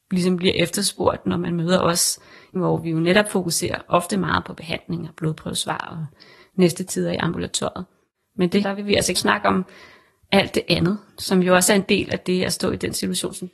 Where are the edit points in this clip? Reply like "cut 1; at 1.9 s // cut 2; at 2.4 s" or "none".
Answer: cut 1; at 2.6 s // cut 2; at 8.6 s // cut 3; at 9.2 s // cut 4; at 11.1 s